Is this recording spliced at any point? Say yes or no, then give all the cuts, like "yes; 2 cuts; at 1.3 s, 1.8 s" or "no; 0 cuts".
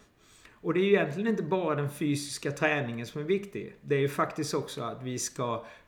no; 0 cuts